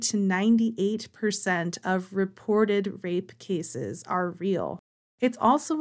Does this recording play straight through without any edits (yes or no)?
yes